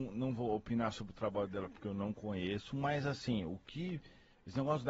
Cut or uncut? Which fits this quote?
uncut